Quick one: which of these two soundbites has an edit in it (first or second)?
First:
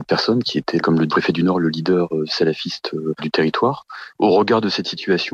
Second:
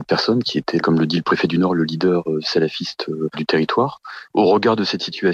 first